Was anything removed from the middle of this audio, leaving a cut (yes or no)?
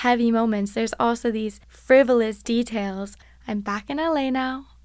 yes